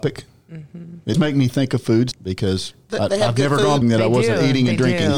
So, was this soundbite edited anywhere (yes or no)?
yes